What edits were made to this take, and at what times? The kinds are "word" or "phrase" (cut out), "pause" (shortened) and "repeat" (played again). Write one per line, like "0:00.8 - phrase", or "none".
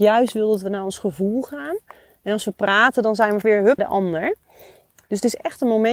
0:03.4 - word
0:03.8 - word

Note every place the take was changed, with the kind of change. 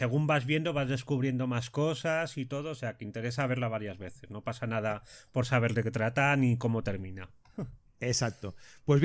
none

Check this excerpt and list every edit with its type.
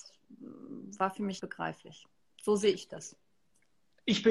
0:01.4 - word

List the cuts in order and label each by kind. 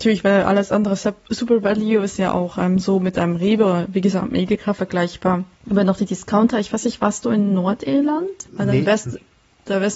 0:05.5 - pause
0:08.5 - pause

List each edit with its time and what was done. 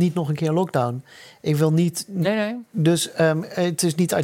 none

